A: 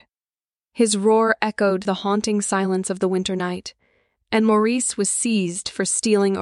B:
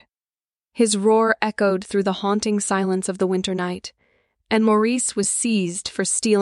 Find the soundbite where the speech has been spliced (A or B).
A